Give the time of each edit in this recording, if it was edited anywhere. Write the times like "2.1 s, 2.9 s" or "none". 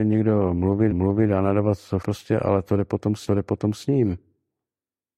0.9 s, 2.0 s, 3.3 s